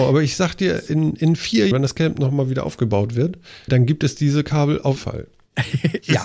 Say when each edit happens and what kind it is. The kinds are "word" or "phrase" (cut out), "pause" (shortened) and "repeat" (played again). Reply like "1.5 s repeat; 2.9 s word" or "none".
1.7 s word; 3.7 s word; 5.0 s word